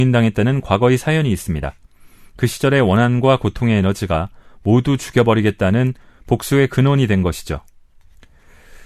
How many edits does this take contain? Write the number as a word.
zero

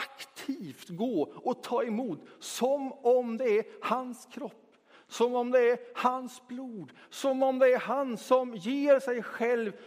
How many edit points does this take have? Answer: zero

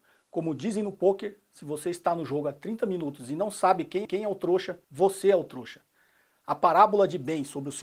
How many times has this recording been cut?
two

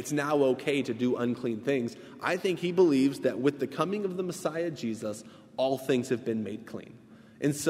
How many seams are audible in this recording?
zero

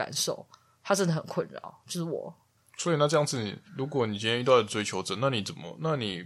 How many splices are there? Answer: one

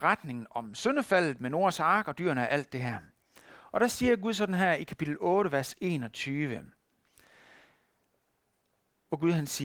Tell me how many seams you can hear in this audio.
zero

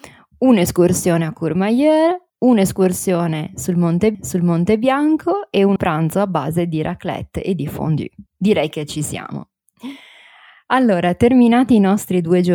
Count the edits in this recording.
four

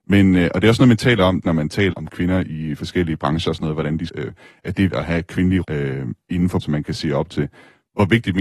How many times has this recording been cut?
six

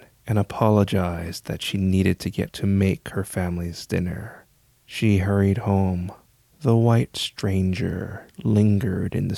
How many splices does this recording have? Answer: two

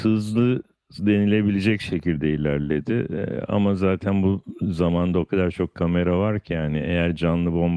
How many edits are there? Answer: zero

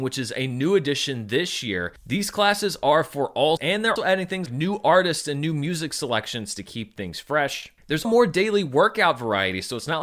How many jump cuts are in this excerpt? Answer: four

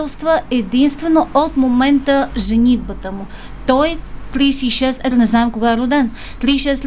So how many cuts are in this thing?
two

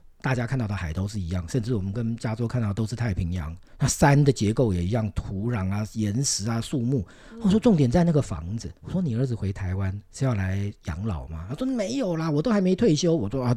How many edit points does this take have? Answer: three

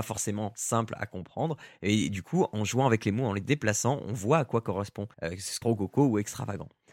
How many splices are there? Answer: two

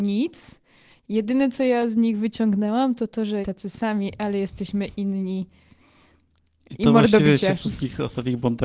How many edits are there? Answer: one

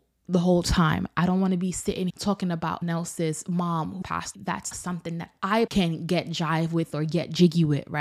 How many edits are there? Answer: six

